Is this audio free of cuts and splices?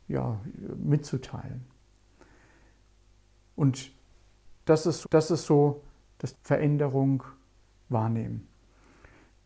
no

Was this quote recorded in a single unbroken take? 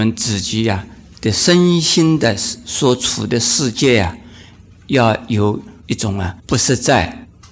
no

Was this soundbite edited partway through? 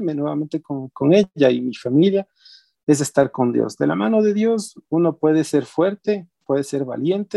no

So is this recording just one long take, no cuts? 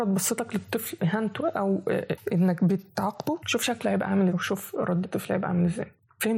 no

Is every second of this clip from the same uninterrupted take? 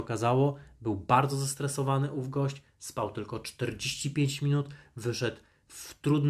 yes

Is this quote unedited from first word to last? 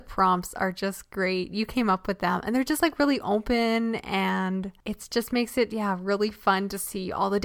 yes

